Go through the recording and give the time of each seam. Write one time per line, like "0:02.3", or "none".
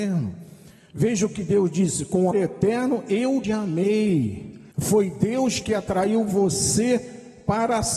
0:02.3
0:03.4
0:04.7